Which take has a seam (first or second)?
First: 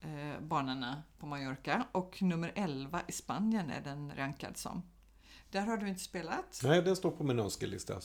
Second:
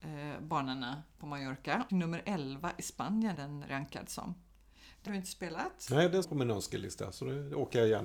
second